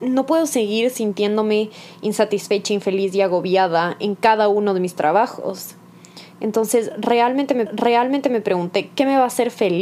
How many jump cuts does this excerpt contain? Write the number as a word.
one